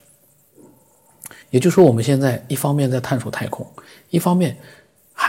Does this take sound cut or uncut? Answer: cut